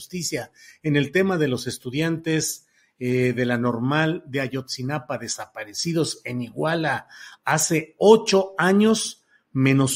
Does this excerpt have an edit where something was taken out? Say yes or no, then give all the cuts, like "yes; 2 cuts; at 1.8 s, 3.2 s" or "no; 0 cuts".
no; 0 cuts